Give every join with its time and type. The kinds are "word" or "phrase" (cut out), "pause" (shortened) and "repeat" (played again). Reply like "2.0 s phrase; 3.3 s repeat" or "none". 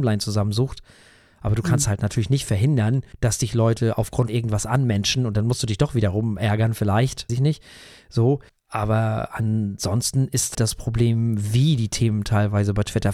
3.1 s pause; 4.3 s word; 7.3 s word; 8.5 s pause; 10.5 s word